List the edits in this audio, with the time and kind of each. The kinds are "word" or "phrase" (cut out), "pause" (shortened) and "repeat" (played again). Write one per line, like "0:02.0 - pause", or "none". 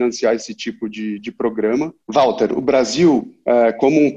0:02.0 - pause

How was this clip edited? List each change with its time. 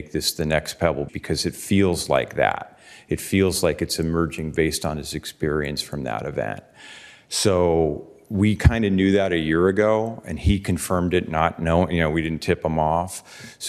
0:01.1 - word

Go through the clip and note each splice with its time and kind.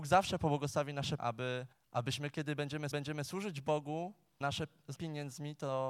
0:01.2 - word
0:01.7 - pause
0:02.9 - repeat
0:04.4 - word
0:05.0 - word

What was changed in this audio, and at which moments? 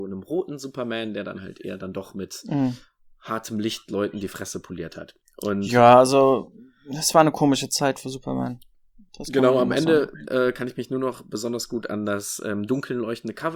none

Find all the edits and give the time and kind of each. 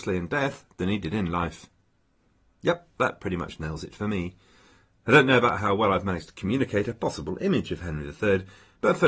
none

